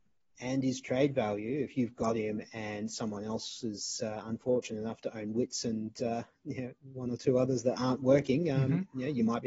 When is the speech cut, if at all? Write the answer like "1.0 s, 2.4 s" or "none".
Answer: none